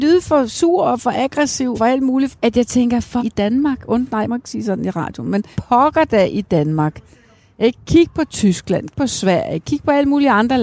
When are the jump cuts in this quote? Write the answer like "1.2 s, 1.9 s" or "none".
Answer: 1.7 s, 2.3 s, 3.2 s, 4.3 s, 5.5 s, 8.9 s